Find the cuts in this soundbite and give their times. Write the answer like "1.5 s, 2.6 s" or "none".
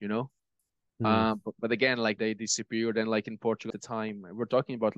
2.2 s, 3.7 s